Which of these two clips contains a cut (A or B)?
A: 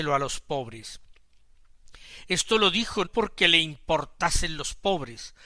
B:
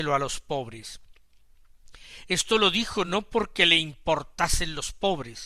A